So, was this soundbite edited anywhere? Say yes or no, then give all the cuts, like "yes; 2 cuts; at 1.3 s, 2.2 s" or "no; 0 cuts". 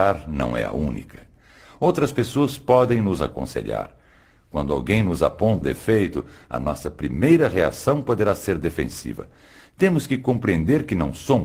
yes; 1 cut; at 5.6 s